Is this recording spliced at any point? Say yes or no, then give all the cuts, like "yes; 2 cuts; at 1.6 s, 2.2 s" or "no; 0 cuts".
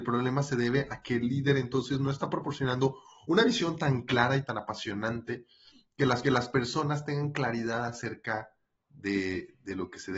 yes; 2 cuts; at 6.2 s, 8.8 s